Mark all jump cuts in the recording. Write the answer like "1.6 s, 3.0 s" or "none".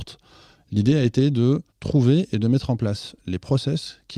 1.7 s